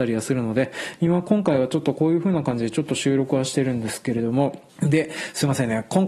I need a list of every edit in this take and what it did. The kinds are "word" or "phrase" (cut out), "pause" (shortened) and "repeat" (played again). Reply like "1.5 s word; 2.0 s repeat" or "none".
4.7 s pause